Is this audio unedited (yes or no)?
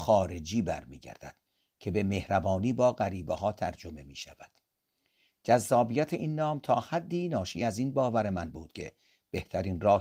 yes